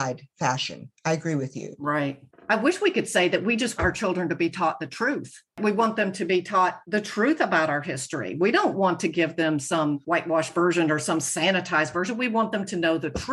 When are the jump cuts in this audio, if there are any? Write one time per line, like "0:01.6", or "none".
0:03.8